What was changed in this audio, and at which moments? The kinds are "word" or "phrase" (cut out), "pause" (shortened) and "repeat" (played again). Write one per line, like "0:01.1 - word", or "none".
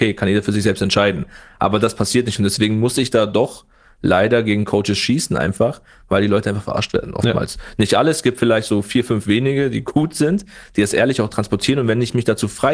none